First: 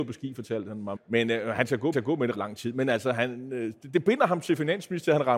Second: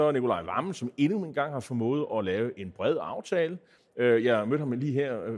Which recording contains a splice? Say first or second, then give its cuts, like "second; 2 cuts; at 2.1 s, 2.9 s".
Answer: first; 3 cuts; at 1.0 s, 1.9 s, 2.3 s